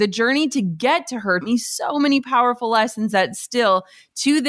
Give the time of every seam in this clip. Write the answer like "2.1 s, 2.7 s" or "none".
1.4 s